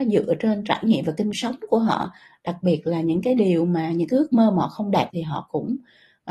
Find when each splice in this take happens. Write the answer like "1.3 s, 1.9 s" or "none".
1.3 s, 5.1 s